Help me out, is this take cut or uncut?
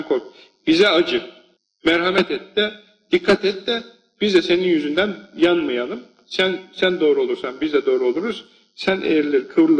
uncut